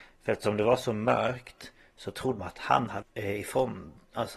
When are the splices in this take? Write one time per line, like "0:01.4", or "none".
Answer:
0:02.4
0:03.0